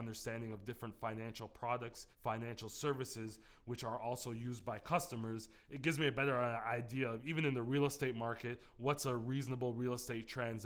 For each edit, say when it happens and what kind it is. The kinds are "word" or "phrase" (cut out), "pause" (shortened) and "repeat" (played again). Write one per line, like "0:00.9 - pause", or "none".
0:02.1 - pause